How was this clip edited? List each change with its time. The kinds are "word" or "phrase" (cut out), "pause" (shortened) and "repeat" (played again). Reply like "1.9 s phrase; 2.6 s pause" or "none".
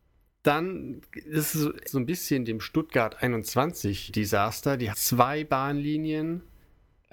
1.8 s word; 4.1 s word; 4.9 s word